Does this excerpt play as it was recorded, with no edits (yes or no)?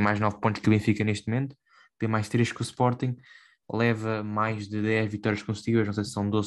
yes